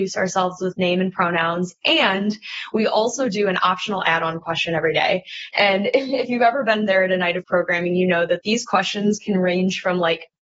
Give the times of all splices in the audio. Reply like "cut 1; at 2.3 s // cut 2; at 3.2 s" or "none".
none